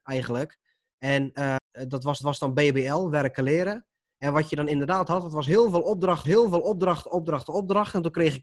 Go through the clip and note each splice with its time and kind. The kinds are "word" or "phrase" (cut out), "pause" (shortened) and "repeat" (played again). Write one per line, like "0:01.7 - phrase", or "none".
0:01.6 - word
0:02.2 - repeat
0:06.2 - repeat

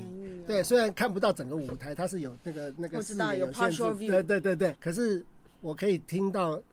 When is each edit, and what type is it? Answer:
0:04.8 - word

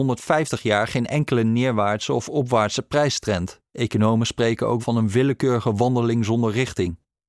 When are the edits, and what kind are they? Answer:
0:03.7 - pause
0:04.8 - word

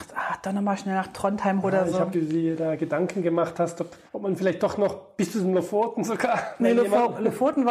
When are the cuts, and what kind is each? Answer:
0:01.6 - word
0:02.1 - word
0:04.1 - pause

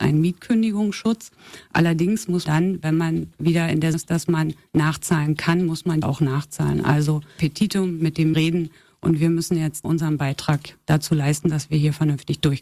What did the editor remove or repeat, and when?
0:02.5 - word
0:03.9 - word
0:06.0 - word
0:07.4 - word
0:08.3 - word
0:09.8 - word

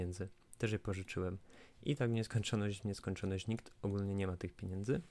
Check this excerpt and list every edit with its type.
none

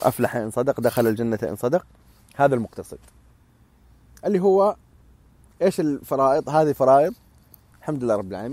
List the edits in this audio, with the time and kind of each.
none

